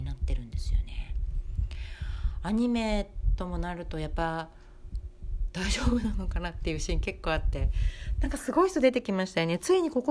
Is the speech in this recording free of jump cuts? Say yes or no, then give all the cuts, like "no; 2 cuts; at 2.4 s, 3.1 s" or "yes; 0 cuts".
yes; 0 cuts